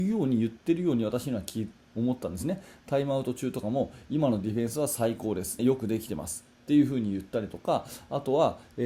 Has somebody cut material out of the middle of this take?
yes; 1 cut; at 5.6 s

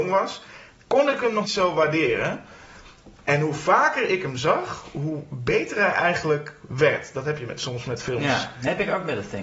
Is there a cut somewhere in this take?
yes; 1 cut; at 1.4 s

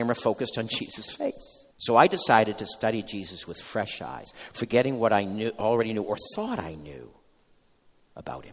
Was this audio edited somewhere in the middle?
yes; 1 cut; at 1.7 s

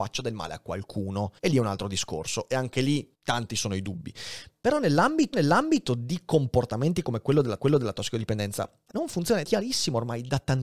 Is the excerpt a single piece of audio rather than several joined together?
no; 6 cuts; at 1.4 s, 3.1 s, 5.3 s, 7.6 s, 8.9 s, 9.4 s

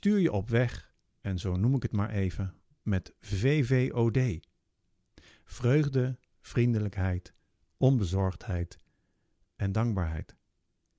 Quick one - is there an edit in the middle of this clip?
no; 0 cuts

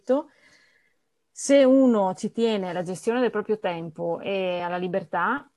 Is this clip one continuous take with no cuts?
yes; 0 cuts

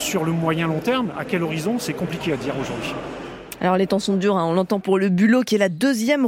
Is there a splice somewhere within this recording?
yes; 1 cut; at 4.8 s

